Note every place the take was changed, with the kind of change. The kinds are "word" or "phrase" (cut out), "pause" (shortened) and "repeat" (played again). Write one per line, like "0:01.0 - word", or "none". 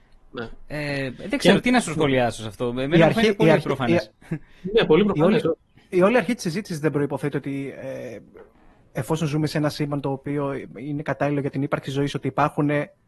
none